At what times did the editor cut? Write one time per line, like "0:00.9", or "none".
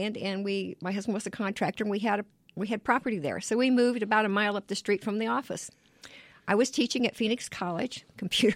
none